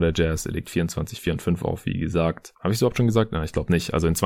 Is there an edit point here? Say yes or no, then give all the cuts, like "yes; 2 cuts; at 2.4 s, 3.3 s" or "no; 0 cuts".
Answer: no; 0 cuts